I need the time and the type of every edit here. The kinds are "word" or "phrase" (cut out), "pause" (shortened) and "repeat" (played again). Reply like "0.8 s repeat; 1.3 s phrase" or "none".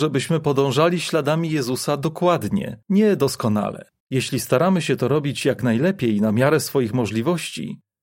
2.8 s pause; 4.0 s pause